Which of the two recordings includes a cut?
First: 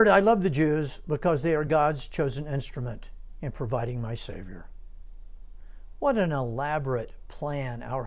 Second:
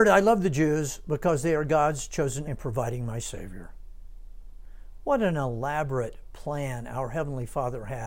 second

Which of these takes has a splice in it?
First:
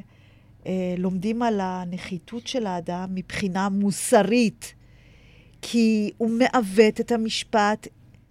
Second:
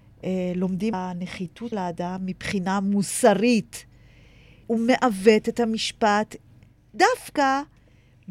second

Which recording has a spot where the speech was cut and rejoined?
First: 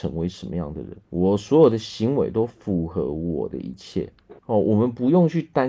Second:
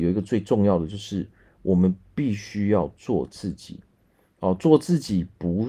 first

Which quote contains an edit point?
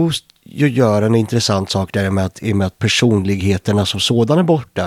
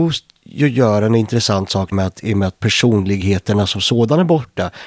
second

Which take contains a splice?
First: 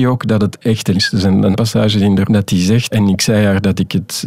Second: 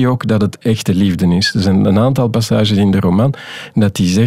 first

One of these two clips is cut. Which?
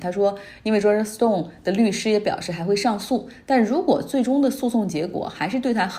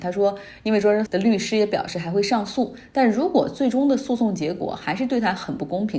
second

